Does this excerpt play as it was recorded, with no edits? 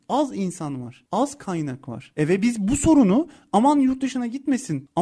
yes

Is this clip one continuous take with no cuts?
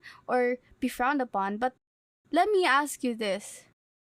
yes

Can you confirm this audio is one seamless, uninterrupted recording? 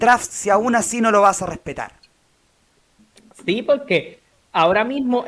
yes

